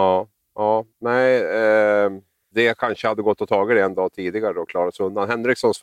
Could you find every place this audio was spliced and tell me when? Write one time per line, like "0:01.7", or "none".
none